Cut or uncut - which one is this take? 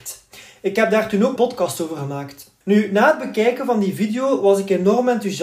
cut